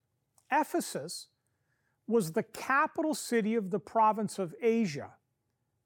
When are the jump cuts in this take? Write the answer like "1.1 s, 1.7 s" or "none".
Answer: none